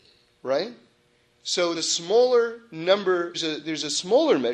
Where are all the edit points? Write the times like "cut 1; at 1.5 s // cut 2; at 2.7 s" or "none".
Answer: cut 1; at 1.7 s // cut 2; at 3.3 s